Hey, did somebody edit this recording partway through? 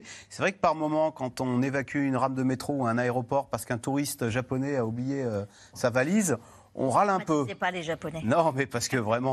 no; 0 cuts

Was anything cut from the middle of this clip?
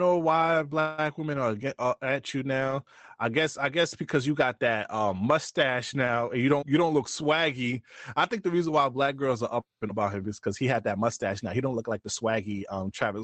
yes; 2 cuts; at 6.6 s, 9.9 s

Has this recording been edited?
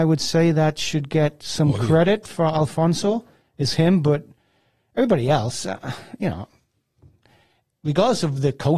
no; 0 cuts

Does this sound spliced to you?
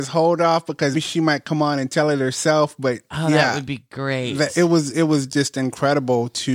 yes; 1 cut; at 0.9 s

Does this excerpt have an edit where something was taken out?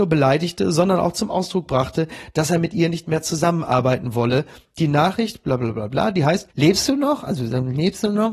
yes; 1 cut; at 6.5 s

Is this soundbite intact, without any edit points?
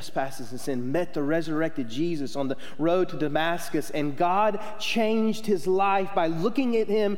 yes; 0 cuts

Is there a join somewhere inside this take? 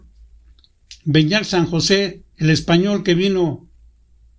yes; 2 cuts; at 1.0 s, 2.3 s

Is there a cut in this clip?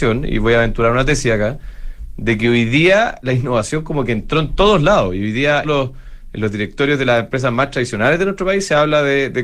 yes; 1 cut; at 5.6 s

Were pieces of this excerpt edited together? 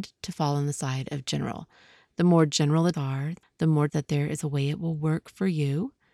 yes; 3 cuts; at 2.9 s, 3.4 s, 3.9 s

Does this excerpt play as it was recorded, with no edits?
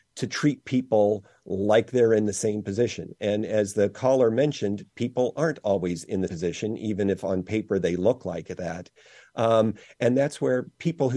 no; 1 cut; at 6.3 s

